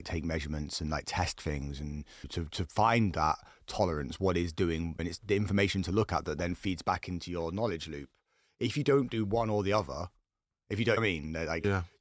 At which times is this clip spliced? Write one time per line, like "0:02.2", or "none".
none